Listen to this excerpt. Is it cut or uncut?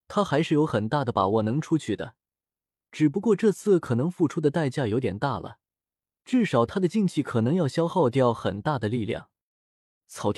uncut